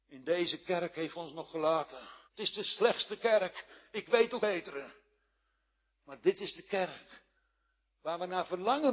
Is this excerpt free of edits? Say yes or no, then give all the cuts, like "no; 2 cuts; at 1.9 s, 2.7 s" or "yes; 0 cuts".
no; 3 cuts; at 1.1 s, 2.3 s, 4.4 s